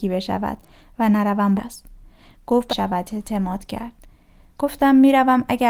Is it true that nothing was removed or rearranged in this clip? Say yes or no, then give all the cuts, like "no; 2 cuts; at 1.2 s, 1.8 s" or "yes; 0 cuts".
no; 2 cuts; at 1.6 s, 2.7 s